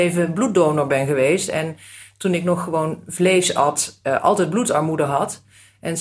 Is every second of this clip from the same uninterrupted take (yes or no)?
yes